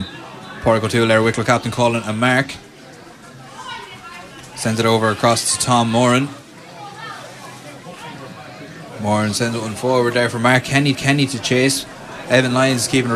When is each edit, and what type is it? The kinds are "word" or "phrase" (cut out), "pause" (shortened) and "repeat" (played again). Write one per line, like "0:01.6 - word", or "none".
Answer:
0:10.9 - repeat